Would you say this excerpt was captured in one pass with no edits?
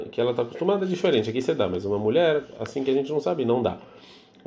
yes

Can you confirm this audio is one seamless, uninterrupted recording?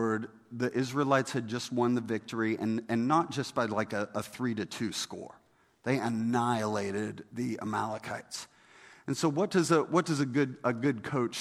yes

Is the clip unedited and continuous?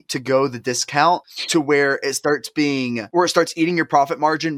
yes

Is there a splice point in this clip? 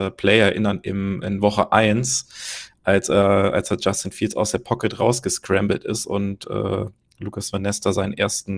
no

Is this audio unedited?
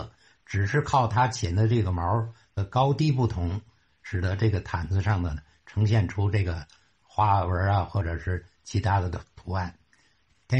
yes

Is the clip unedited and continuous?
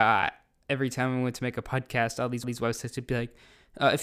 no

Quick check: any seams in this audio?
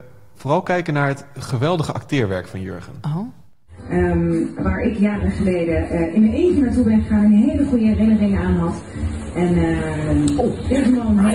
no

